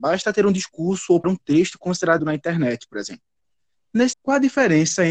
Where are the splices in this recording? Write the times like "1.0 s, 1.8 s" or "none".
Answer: 1.2 s, 2.2 s, 4.1 s